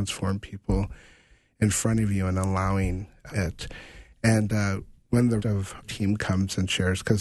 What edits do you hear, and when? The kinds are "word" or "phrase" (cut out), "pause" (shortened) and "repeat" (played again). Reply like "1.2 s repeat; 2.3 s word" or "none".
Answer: 3.3 s word; 5.4 s word; 5.8 s word